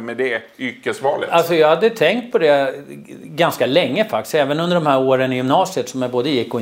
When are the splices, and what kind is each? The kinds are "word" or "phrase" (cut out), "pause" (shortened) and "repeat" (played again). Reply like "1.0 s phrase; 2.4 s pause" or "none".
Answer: none